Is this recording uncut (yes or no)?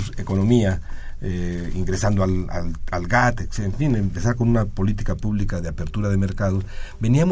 yes